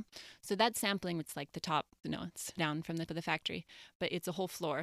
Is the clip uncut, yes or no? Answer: no